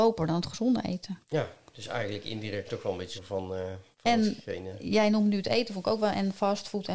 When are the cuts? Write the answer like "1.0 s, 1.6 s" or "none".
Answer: 1.2 s, 2.7 s, 3.2 s, 3.9 s